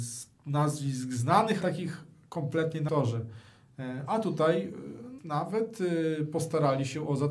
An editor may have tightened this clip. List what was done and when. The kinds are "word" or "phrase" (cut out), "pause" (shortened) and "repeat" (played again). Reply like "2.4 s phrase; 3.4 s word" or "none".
1.6 s word; 2.9 s word; 5.2 s word